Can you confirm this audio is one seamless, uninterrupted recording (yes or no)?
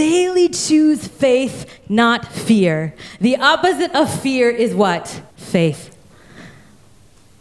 no